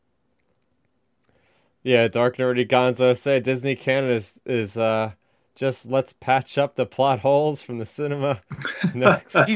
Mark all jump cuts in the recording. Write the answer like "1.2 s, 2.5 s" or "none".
none